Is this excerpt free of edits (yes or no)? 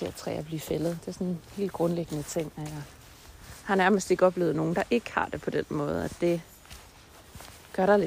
yes